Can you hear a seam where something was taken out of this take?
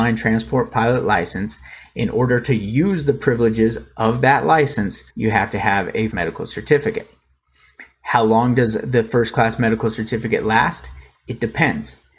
yes; 2 cuts; at 5.1 s, 6.1 s

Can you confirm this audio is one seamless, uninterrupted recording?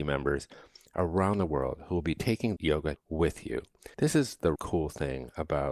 no; 4 cuts; at 2.6 s, 3.0 s, 3.9 s, 4.6 s

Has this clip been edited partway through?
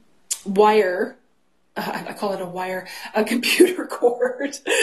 no; 0 cuts

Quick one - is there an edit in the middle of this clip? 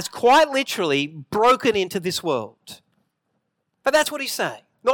no; 0 cuts

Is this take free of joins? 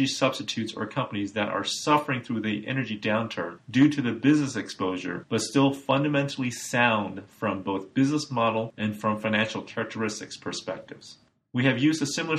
yes; 0 cuts

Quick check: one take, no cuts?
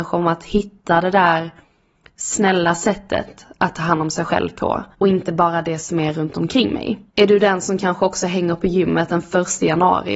no; 2 cuts; at 4.9 s, 7.1 s

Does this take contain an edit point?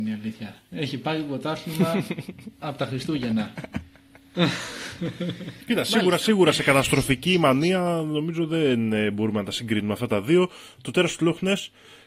yes; 1 cut; at 5.6 s

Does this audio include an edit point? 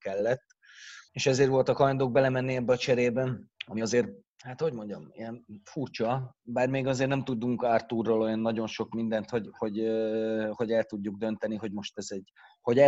yes; 2 cuts; at 1.1 s, 3.6 s

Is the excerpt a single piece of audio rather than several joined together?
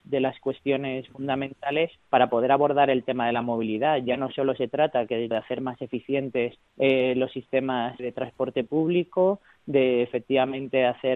no; 4 cuts; at 2.0 s, 5.3 s, 6.7 s, 8.0 s

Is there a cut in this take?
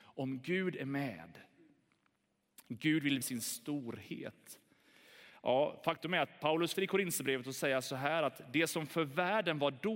yes; 2 cuts; at 3.2 s, 6.7 s

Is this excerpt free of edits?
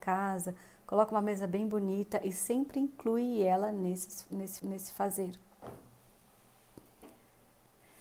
no; 1 cut; at 4.6 s

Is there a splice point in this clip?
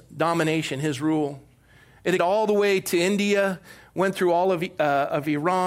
yes; 1 cut; at 2.2 s

